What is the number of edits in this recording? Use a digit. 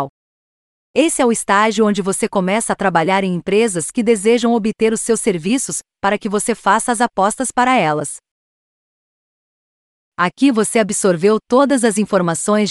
0